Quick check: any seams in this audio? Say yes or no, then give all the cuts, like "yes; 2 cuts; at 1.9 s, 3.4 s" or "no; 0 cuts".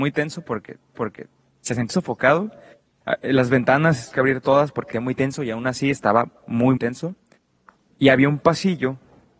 yes; 5 cuts; at 0.9 s, 1.9 s, 4.1 s, 4.9 s, 6.8 s